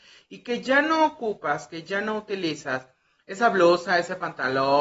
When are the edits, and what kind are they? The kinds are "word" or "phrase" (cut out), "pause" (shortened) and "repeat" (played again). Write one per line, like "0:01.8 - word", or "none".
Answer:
none